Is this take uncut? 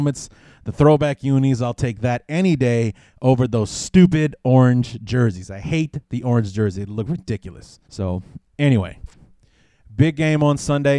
no; 1 cut; at 7.8 s

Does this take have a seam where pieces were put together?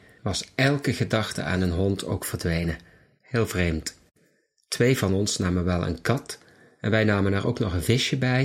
no; 0 cuts

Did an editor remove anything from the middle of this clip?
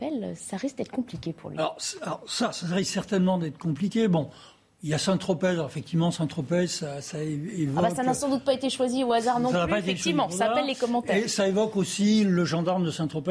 no; 0 cuts

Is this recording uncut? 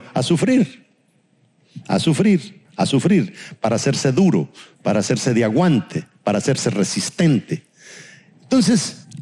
yes; 0 cuts

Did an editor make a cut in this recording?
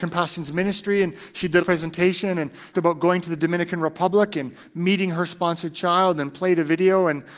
yes; 2 cuts; at 1.6 s, 2.7 s

